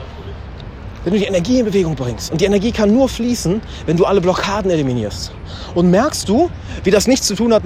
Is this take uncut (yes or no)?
yes